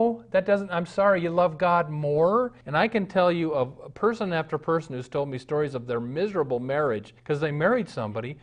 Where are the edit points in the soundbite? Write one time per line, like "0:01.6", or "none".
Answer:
0:02.6
0:07.2